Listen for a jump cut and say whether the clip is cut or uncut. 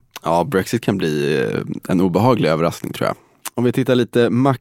uncut